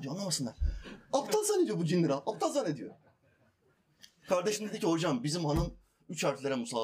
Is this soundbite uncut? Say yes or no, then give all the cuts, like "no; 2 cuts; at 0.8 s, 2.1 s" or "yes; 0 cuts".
yes; 0 cuts